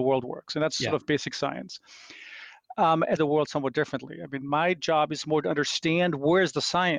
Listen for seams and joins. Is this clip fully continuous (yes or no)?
no